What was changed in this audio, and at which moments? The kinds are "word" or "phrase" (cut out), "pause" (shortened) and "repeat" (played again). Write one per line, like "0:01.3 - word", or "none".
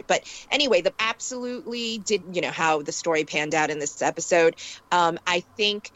0:00.9 - phrase
0:02.2 - phrase